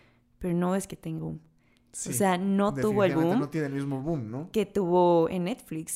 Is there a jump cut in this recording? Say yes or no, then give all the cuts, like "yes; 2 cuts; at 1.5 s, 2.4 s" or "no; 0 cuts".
yes; 1 cut; at 1.2 s